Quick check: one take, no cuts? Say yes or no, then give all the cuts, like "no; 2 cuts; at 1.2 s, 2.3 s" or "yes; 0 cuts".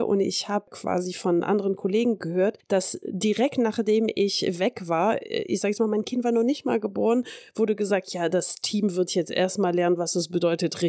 yes; 0 cuts